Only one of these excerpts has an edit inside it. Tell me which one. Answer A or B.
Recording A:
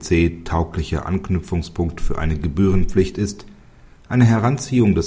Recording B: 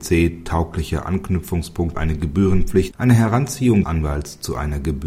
B